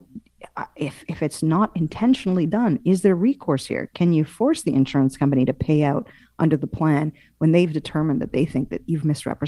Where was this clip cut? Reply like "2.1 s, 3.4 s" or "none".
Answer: none